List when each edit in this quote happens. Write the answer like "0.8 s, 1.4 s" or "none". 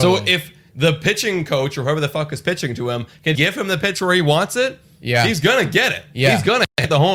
3.3 s